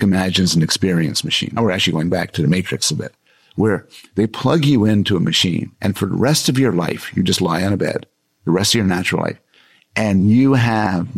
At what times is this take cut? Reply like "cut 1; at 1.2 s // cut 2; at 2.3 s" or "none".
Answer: cut 1; at 1.6 s